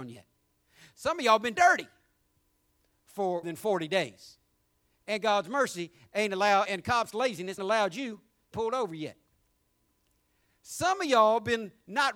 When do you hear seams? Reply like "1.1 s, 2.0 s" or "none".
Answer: 1.5 s, 3.4 s, 6.6 s, 7.6 s, 8.5 s